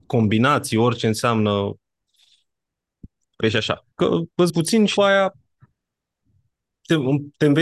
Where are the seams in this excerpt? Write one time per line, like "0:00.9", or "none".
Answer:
0:03.4
0:03.9
0:04.5
0:05.0